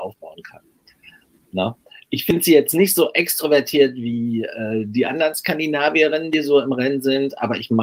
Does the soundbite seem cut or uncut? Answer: uncut